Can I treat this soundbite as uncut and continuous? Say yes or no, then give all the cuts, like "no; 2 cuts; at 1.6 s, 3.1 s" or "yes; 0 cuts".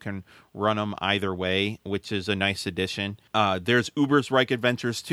no; 1 cut; at 3.3 s